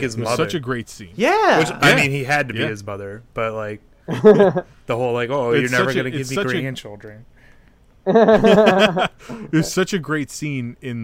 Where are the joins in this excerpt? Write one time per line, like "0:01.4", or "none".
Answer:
none

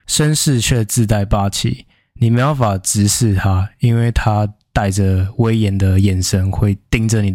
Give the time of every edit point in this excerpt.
none

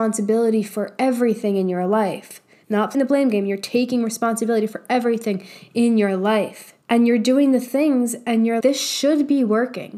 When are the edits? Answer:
0:02.9
0:06.8
0:08.6

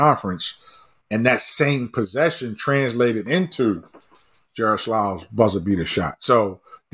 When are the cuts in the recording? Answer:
none

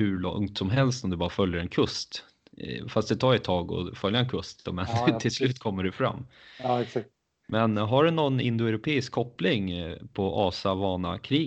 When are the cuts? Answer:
none

